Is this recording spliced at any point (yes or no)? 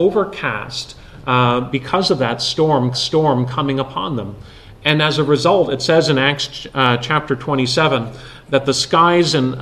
yes